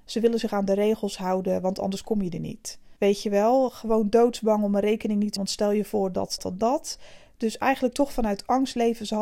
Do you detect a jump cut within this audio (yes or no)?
yes